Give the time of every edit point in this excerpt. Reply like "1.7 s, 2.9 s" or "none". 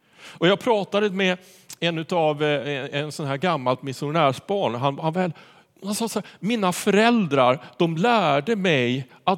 none